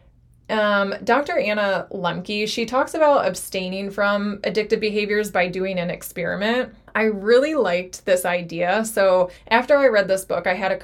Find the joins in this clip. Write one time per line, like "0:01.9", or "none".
0:06.9
0:09.4